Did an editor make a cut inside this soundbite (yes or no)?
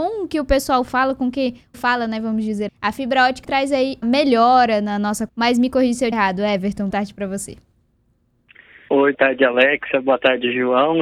yes